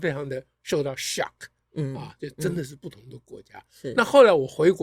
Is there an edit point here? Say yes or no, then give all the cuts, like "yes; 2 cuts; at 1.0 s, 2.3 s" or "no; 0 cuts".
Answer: no; 0 cuts